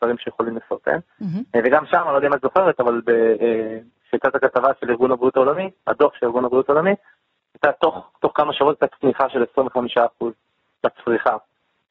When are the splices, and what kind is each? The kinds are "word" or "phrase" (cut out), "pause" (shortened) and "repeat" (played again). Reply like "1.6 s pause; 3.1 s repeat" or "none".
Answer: none